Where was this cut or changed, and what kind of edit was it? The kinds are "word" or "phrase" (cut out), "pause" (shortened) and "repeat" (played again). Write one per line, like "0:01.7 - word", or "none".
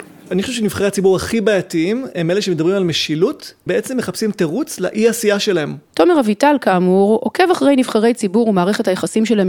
0:03.7 - phrase
0:05.8 - pause